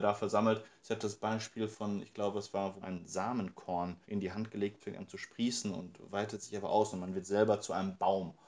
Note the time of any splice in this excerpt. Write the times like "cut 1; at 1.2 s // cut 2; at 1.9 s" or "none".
cut 1; at 2.8 s // cut 2; at 4.0 s // cut 3; at 4.8 s